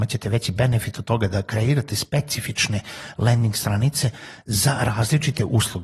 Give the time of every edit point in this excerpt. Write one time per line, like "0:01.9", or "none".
none